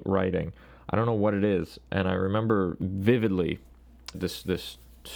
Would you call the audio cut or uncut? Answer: cut